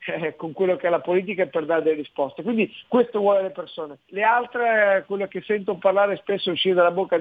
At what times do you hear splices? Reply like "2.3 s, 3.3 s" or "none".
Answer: 4.0 s

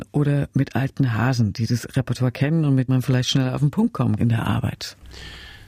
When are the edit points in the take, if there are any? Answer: 2.9 s, 4.2 s

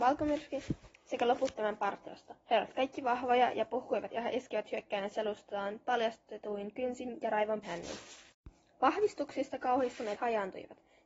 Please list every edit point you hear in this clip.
2.4 s, 4.1 s, 7.6 s, 10.2 s

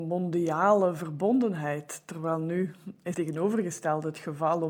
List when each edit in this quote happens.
3.1 s

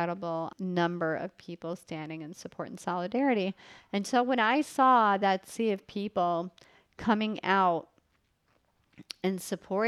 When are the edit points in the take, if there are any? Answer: none

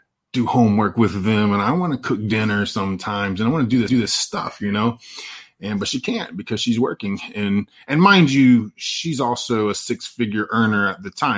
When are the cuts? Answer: 3.9 s

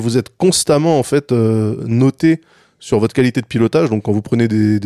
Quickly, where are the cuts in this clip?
none

